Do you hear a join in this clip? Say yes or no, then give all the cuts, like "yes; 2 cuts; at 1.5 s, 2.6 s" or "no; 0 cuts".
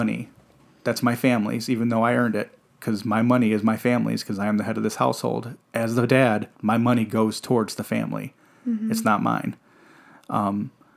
yes; 2 cuts; at 5.6 s, 6.5 s